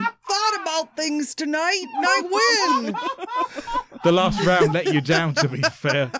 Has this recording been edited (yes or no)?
no